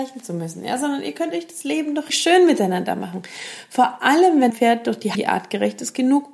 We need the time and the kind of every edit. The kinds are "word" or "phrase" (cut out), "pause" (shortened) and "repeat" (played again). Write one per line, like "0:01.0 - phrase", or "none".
0:02.1 - word
0:04.5 - word
0:05.1 - word